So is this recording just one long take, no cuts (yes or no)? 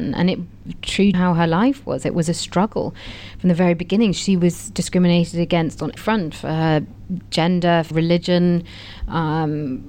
no